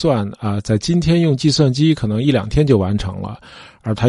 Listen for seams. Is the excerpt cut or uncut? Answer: uncut